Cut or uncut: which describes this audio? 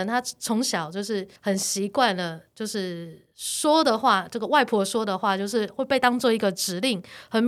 cut